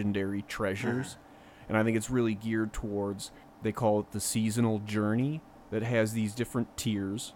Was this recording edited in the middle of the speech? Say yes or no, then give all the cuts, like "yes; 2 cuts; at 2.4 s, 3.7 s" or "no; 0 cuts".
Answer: no; 0 cuts